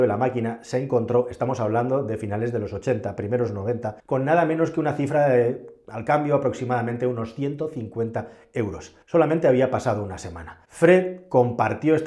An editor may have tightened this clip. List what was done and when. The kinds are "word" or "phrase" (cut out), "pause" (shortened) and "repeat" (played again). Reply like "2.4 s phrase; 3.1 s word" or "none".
4.0 s pause; 9.0 s pause; 10.6 s pause